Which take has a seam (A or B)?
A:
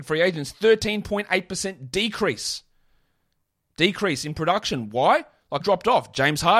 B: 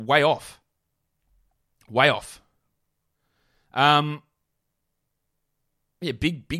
A